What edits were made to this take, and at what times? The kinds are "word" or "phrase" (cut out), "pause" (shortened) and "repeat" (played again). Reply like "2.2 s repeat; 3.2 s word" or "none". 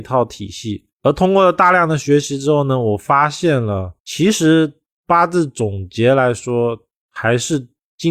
0.9 s pause; 4.0 s pause